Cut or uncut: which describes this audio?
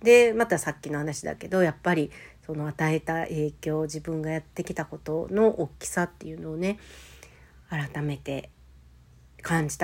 uncut